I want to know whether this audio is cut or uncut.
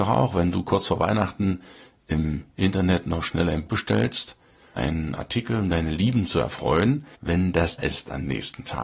cut